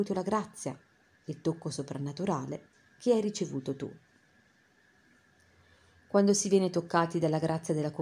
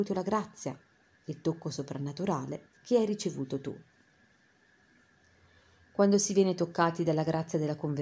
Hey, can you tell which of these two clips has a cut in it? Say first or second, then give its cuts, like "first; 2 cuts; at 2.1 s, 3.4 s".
second; 1 cut; at 2.8 s